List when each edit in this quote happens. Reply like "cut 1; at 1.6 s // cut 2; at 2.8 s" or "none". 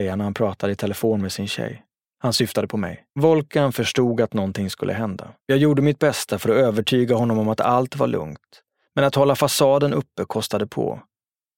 cut 1; at 2.0 s // cut 2; at 3.1 s // cut 3; at 5.4 s